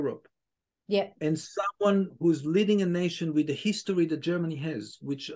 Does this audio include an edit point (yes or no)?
no